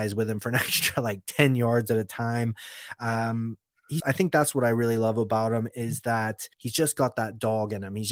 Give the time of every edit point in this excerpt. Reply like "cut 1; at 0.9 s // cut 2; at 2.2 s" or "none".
cut 1; at 4.0 s // cut 2; at 6.5 s